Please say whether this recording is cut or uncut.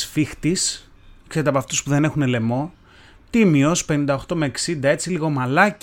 uncut